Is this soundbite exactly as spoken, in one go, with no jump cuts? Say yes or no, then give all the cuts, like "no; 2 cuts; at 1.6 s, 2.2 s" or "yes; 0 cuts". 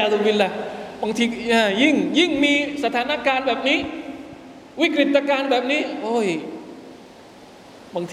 yes; 0 cuts